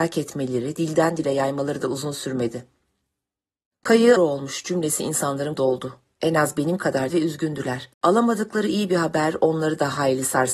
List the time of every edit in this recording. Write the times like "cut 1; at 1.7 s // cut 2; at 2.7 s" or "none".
cut 1; at 4.2 s // cut 2; at 5.5 s // cut 3; at 7.1 s // cut 4; at 7.9 s